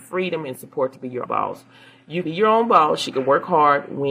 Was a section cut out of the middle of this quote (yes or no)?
yes